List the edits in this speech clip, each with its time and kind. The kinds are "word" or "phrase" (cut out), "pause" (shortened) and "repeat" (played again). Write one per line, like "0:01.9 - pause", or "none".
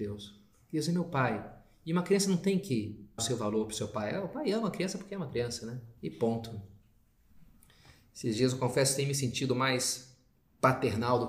0:03.2 - word
0:06.0 - pause